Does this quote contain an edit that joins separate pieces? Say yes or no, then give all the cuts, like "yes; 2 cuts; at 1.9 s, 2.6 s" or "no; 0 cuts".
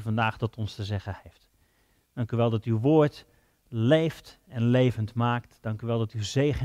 no; 0 cuts